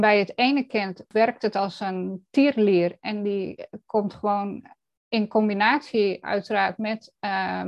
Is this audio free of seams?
yes; 0 cuts

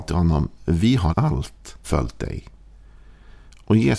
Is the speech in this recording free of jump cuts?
no; 2 cuts; at 1.1 s, 1.8 s

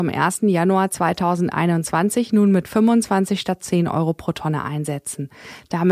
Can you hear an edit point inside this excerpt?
no; 0 cuts

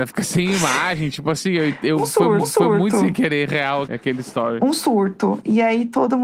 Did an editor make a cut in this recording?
yes; 2 cuts; at 2.4 s, 3.8 s

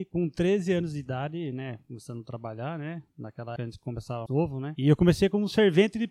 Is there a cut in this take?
yes; 2 cuts; at 3.6 s, 4.3 s

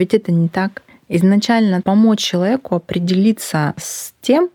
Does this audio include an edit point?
yes; 1 cut; at 1.8 s

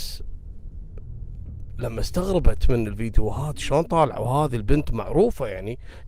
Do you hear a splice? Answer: no; 0 cuts

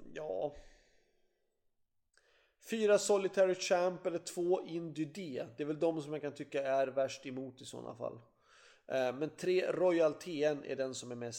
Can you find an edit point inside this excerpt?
no; 0 cuts

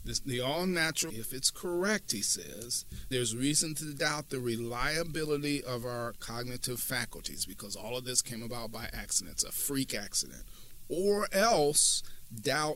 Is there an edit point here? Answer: yes; 2 cuts; at 1.1 s, 3.1 s

